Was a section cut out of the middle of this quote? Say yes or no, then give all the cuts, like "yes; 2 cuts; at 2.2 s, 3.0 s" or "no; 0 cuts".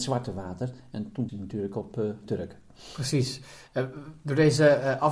yes; 2 cuts; at 1.3 s, 2.3 s